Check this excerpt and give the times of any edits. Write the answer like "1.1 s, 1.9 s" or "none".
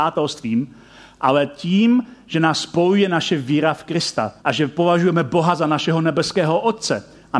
4.4 s